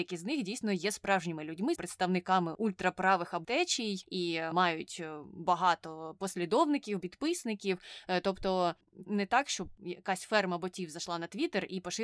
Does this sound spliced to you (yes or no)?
yes